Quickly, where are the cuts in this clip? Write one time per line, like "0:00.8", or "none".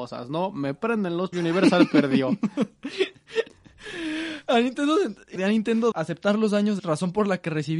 0:01.3
0:05.4
0:05.9
0:06.8